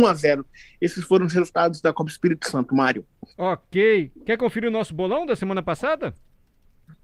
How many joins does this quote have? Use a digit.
1